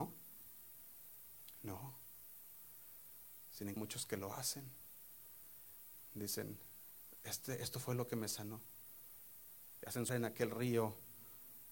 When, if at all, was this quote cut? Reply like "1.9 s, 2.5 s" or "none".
3.8 s, 10.1 s